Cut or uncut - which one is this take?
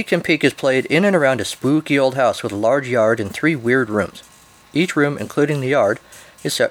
uncut